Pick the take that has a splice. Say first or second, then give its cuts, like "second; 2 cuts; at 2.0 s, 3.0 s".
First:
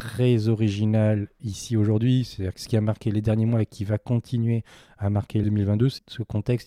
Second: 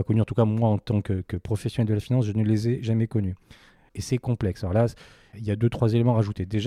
first; 2 cuts; at 1.4 s, 5.4 s